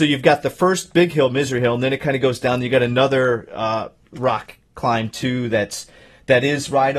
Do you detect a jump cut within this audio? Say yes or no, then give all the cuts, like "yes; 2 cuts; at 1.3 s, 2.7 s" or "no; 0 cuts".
no; 0 cuts